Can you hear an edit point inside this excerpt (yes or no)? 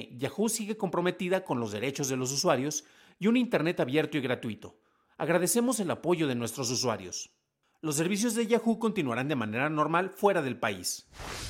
no